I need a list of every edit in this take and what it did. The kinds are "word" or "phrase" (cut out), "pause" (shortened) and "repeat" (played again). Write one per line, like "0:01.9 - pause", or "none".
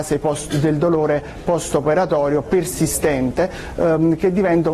none